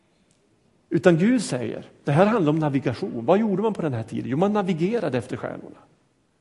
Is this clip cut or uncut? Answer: uncut